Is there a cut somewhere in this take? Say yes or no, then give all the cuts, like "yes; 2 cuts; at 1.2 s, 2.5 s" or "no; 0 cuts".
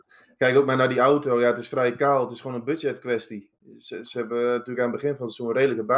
no; 0 cuts